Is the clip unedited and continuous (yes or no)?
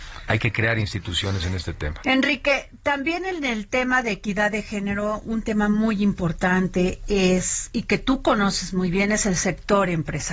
yes